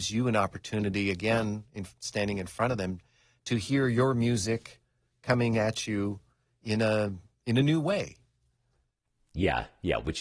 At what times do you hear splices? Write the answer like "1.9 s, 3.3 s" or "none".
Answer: none